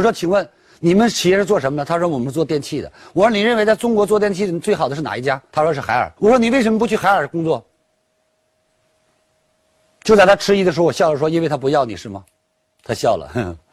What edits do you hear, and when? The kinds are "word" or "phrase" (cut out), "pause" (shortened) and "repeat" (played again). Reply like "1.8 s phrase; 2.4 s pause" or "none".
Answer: 5.5 s pause; 6.2 s pause